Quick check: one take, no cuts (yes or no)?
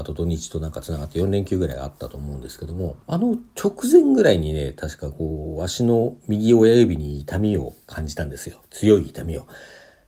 no